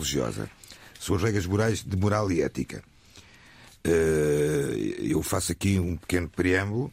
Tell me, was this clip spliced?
no; 0 cuts

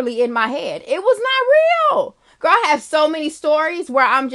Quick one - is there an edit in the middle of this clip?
no; 0 cuts

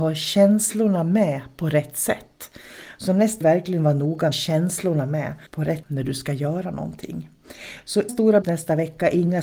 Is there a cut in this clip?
yes; 6 cuts; at 3.4 s, 4.3 s, 5.5 s, 5.8 s, 8.1 s, 8.4 s

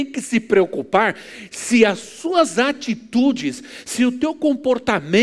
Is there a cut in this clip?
no; 0 cuts

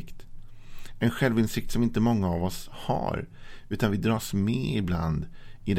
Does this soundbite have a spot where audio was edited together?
no; 0 cuts

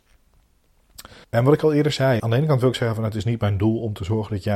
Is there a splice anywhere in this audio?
yes; 2 cuts; at 1.2 s, 2.2 s

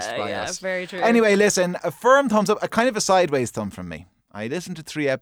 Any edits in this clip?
yes; 1 cut; at 1.8 s

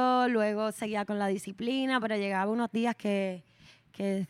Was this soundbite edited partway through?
no; 0 cuts

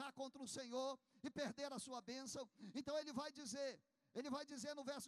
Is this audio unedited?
yes; 0 cuts

